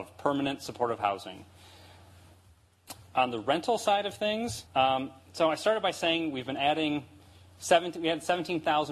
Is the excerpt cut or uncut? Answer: cut